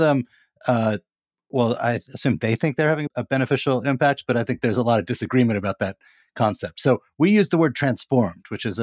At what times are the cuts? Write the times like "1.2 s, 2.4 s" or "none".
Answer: none